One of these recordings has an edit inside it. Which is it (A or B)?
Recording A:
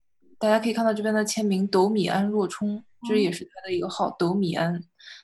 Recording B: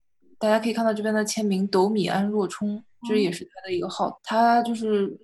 B